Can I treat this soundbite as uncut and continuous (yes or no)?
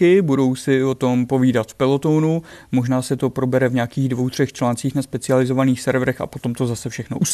yes